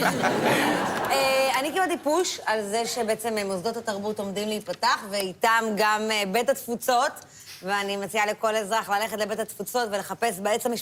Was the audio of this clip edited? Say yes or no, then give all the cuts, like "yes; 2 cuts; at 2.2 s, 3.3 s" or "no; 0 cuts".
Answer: no; 0 cuts